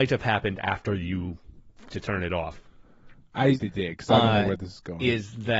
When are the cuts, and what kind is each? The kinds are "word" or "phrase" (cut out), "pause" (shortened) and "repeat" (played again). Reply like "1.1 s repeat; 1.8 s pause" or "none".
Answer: 1.9 s word; 3.6 s word